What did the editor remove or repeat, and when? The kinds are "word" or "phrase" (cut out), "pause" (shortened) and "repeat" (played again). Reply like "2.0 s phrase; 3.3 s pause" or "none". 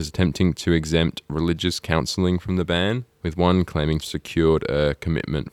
3.1 s pause; 3.6 s phrase; 4.0 s phrase